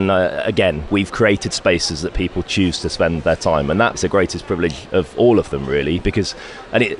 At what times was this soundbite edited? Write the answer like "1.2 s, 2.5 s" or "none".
3.9 s